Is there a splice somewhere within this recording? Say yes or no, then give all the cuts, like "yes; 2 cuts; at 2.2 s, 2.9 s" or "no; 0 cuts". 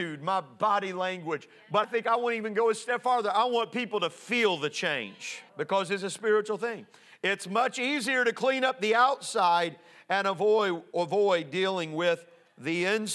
yes; 2 cuts; at 1.8 s, 5.5 s